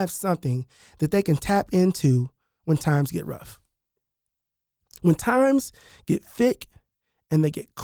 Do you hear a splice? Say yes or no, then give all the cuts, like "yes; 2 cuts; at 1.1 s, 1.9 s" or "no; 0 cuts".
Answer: no; 0 cuts